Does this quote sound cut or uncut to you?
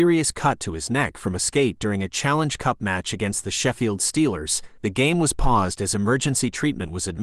cut